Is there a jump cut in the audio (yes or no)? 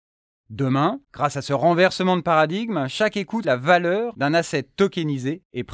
yes